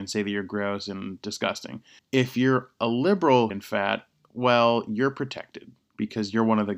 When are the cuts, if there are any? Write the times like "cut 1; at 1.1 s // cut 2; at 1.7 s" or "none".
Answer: cut 1; at 2.0 s // cut 2; at 3.5 s

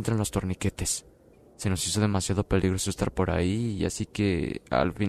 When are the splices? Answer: cut 1; at 1.3 s

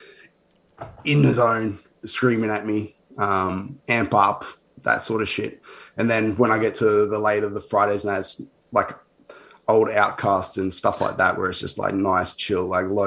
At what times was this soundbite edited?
none

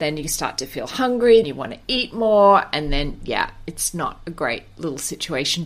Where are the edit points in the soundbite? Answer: cut 1; at 1.4 s

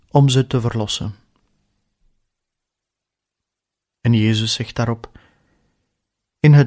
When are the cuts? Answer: none

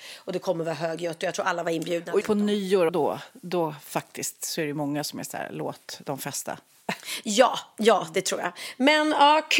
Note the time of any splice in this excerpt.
cut 1; at 2.2 s // cut 2; at 2.9 s

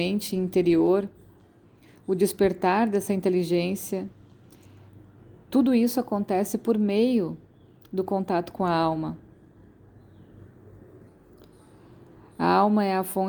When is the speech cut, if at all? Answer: none

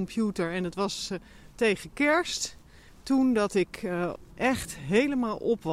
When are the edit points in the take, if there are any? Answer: none

